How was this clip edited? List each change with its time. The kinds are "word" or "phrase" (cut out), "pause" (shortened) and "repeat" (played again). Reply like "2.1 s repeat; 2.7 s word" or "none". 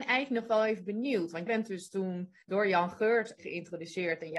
1.5 s word; 2.4 s pause; 3.4 s word